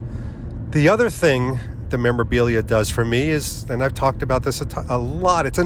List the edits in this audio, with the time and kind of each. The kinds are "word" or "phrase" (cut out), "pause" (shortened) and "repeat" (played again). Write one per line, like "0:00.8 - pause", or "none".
0:01.8 - word